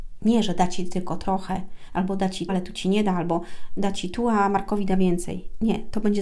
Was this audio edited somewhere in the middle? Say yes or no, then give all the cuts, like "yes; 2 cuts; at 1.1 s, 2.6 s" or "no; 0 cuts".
yes; 1 cut; at 2.5 s